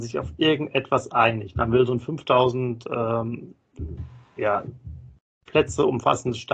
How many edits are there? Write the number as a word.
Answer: zero